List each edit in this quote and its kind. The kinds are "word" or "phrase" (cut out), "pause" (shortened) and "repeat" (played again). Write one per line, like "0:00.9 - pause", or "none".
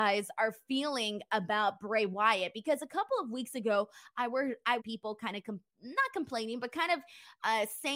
0:04.8 - phrase